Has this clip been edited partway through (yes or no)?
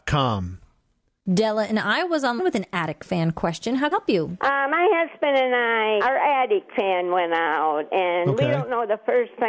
yes